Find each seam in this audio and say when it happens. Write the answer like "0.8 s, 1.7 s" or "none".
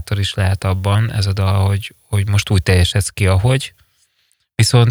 none